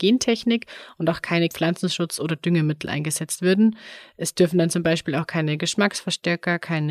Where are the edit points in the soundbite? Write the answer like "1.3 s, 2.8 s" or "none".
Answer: 1.5 s